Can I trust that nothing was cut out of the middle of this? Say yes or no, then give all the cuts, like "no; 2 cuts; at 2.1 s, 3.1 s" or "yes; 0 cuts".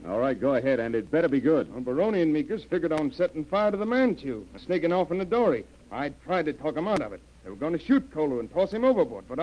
no; 1 cut; at 4.6 s